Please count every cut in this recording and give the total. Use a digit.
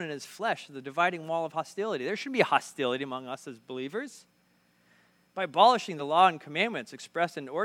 0